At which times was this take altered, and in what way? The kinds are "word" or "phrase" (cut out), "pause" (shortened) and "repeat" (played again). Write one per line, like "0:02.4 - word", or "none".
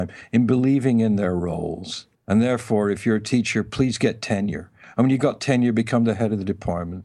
0:02.1 - pause